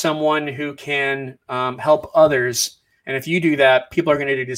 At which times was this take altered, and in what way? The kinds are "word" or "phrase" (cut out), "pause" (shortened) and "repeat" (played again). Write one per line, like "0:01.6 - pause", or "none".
none